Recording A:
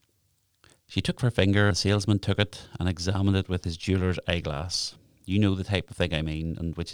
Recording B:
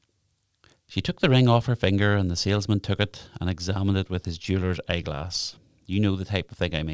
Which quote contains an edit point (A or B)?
A